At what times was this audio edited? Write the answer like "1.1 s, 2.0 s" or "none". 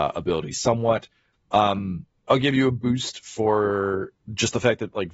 none